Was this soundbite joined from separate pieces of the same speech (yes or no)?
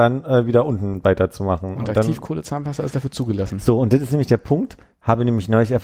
no